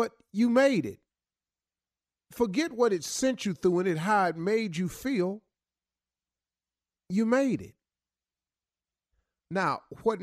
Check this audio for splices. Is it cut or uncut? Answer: uncut